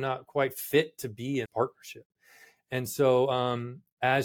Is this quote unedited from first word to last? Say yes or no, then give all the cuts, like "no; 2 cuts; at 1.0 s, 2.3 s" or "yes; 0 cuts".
no; 1 cut; at 1.4 s